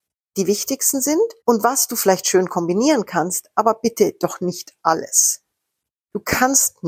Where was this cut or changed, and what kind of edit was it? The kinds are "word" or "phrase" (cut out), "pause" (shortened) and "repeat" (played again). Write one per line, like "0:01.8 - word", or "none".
0:01.4 - pause